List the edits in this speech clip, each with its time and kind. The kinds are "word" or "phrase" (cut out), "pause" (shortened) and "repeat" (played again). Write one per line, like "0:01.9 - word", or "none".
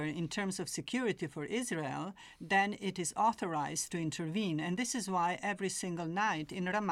none